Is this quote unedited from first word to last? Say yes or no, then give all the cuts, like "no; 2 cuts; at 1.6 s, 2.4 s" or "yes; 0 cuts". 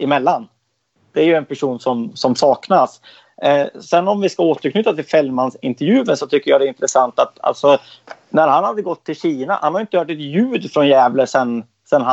no; 1 cut; at 2.1 s